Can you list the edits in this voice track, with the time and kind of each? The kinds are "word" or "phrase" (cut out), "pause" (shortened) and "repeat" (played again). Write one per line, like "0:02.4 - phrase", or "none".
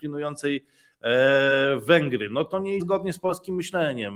0:02.8 - word